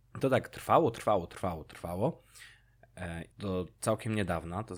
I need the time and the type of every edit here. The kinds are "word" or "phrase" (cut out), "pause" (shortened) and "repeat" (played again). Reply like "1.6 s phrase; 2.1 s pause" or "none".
3.3 s pause